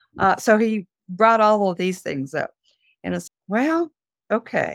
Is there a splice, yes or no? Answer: yes